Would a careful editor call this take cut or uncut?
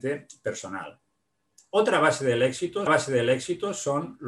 cut